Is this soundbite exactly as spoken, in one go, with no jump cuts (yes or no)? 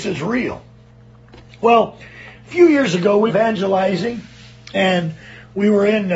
no